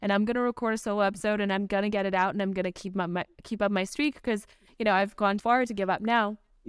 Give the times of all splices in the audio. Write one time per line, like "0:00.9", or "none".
0:05.4

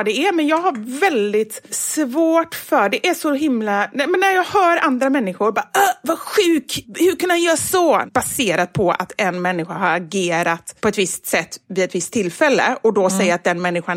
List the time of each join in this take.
none

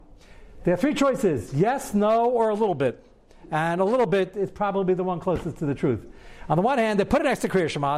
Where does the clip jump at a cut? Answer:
none

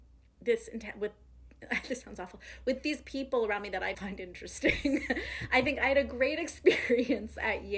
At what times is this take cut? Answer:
0:03.9

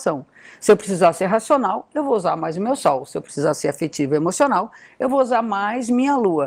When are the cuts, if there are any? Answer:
none

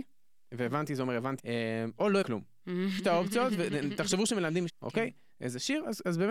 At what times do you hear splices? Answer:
0:01.4
0:02.2
0:03.0
0:04.7

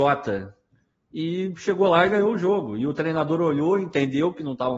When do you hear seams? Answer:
none

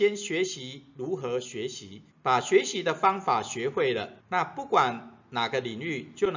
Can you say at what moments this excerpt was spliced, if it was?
0:02.1
0:04.2

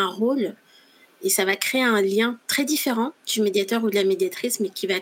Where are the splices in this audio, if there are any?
0:03.2

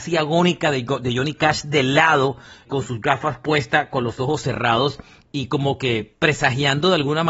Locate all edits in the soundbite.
0:02.7

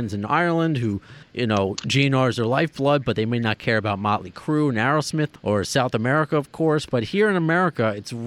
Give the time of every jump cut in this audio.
0:01.2
0:05.4

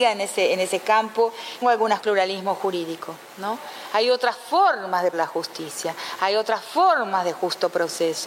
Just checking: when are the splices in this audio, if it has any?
0:01.6
0:02.0
0:05.1

